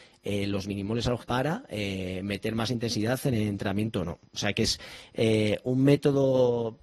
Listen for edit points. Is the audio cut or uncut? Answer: cut